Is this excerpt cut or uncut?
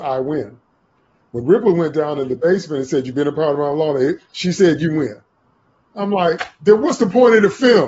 uncut